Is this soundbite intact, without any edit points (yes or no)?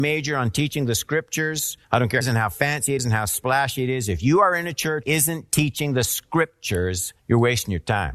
no